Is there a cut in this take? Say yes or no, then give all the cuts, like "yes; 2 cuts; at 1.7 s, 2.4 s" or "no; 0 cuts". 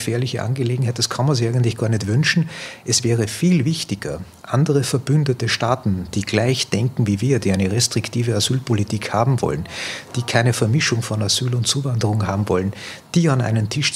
no; 0 cuts